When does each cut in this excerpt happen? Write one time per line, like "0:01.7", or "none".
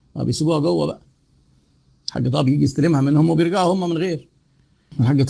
none